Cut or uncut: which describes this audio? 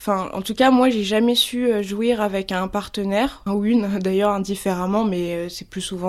cut